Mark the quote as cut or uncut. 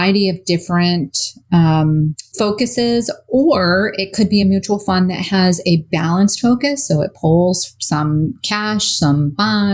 uncut